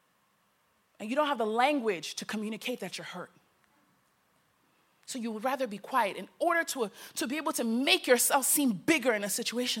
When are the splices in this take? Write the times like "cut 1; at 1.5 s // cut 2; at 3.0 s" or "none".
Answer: none